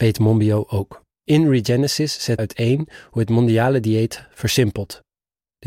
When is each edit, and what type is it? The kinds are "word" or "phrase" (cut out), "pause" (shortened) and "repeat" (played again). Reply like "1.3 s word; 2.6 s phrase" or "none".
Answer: 1.1 s pause; 2.4 s word